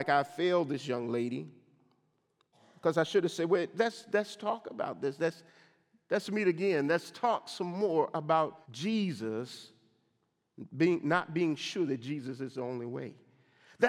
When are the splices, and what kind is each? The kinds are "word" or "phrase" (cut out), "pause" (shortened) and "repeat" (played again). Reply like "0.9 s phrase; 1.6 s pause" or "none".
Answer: 8.6 s pause

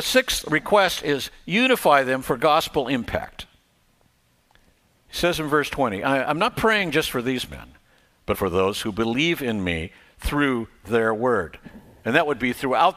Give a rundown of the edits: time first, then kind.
8.3 s word

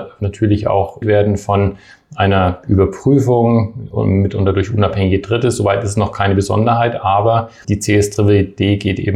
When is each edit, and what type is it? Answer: 1.0 s word; 7.6 s word

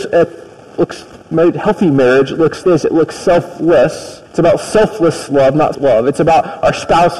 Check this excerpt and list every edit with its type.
2.6 s word; 4.3 s pause; 5.7 s word

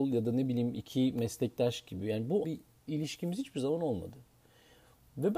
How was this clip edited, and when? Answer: 2.4 s word

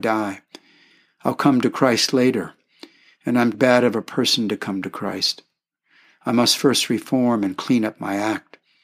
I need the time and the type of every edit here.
3.5 s word

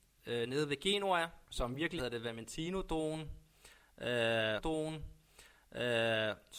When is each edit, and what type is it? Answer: 1.5 s pause; 2.0 s phrase; 4.6 s repeat

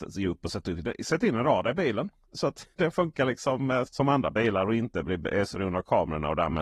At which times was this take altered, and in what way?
2.7 s pause; 3.9 s word; 5.5 s word

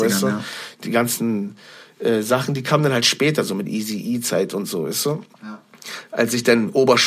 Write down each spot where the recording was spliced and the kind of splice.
5.3 s pause

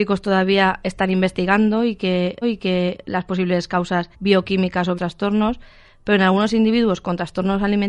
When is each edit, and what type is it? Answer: 2.4 s repeat; 4.1 s pause; 4.9 s phrase

